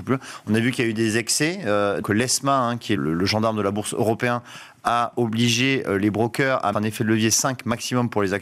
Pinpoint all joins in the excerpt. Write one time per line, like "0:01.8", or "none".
0:02.0
0:03.0
0:06.7